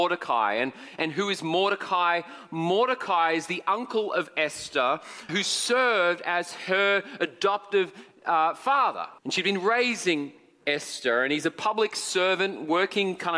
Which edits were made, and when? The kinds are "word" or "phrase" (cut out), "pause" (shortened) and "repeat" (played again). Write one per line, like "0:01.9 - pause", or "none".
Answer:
0:05.3 - word
0:09.2 - pause